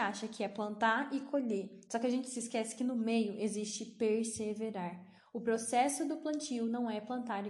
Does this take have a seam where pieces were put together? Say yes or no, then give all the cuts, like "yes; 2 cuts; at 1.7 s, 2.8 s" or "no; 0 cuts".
no; 0 cuts